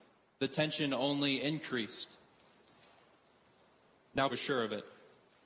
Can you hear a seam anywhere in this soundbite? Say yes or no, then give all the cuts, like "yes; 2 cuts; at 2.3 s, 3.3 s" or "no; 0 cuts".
yes; 1 cut; at 4.3 s